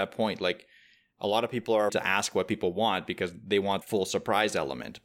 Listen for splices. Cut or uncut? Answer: cut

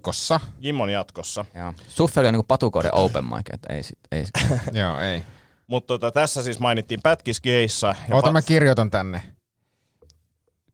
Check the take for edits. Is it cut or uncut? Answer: uncut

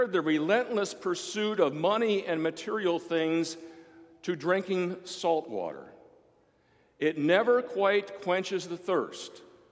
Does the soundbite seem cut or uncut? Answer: uncut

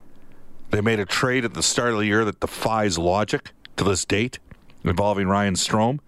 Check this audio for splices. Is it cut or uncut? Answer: uncut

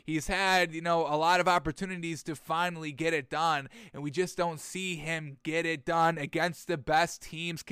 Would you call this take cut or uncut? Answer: uncut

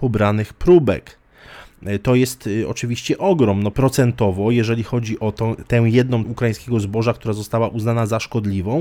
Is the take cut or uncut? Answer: cut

